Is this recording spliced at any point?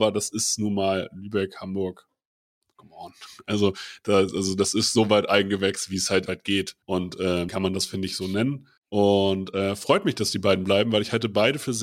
yes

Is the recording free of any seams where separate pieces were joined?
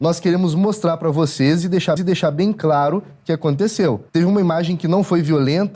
no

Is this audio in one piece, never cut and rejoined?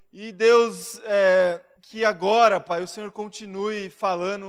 no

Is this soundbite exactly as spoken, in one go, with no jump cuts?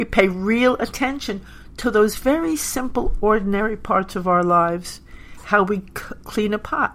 yes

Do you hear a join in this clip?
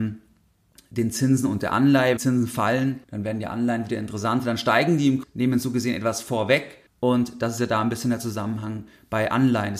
yes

